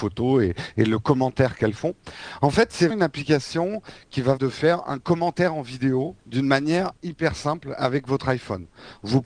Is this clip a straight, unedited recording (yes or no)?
no